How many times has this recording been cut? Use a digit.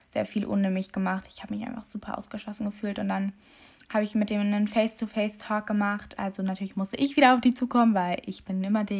0